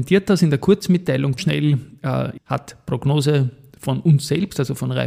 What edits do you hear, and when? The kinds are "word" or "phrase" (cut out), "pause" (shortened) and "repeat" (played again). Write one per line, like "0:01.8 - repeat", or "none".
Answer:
0:01.4 - phrase
0:02.4 - word